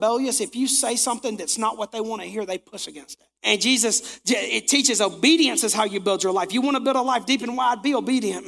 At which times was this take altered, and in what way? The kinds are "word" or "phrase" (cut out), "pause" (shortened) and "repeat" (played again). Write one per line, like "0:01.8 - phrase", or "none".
0:03.4 - pause